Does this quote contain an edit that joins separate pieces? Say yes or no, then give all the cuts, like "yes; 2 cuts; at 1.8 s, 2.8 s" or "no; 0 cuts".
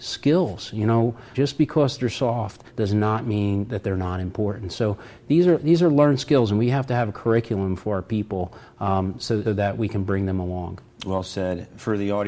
yes; 3 cuts; at 1.3 s, 2.7 s, 9.4 s